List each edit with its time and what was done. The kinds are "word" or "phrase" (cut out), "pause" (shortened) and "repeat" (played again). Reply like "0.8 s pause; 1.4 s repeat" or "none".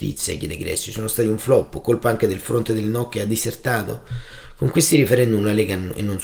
none